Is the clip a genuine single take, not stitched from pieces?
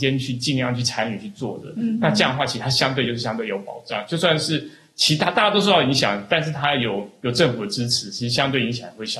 yes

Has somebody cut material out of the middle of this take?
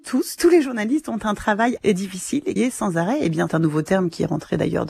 yes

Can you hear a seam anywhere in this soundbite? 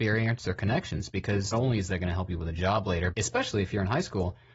yes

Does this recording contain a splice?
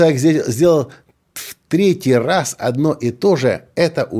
no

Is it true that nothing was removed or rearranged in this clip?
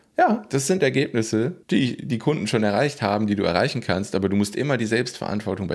no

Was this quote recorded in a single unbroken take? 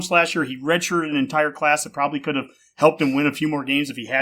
yes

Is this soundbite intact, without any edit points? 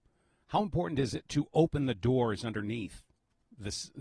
yes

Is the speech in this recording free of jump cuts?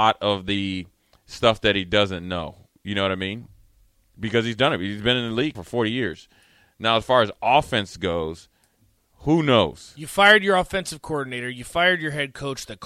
no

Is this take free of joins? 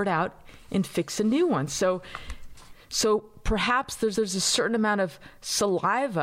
no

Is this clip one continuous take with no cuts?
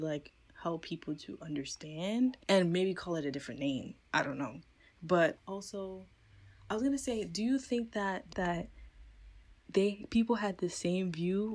no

